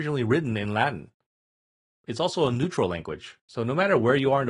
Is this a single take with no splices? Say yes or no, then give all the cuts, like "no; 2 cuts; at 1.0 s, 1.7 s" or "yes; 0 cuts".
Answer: yes; 0 cuts